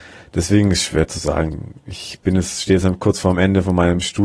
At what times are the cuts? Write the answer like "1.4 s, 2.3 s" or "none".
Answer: none

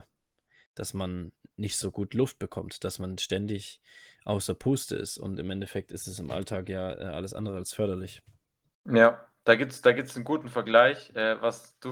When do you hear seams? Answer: none

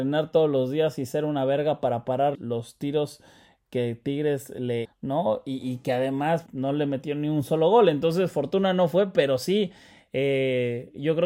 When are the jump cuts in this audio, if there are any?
2.3 s, 4.8 s, 6.5 s

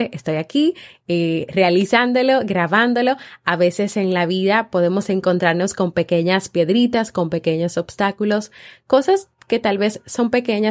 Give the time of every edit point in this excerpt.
none

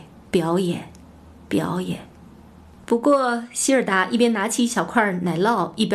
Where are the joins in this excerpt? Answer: none

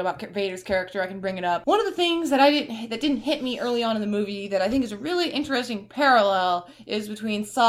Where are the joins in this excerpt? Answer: none

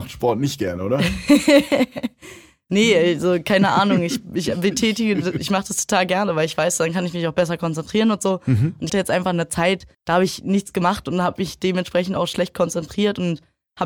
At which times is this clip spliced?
8.9 s, 9.9 s

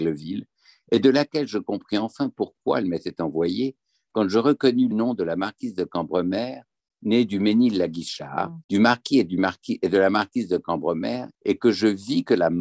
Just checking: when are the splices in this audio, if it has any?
4.9 s, 8.6 s, 11.3 s

